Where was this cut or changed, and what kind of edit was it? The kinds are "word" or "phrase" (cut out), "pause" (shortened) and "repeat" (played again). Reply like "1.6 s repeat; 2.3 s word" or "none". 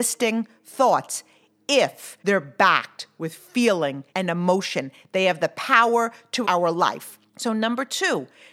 2.2 s pause; 4.1 s pause; 6.4 s word; 7.3 s pause